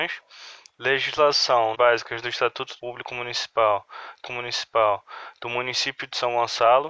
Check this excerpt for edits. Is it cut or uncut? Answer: cut